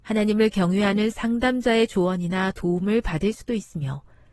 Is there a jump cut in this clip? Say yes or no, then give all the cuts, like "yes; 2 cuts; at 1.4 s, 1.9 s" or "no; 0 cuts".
no; 0 cuts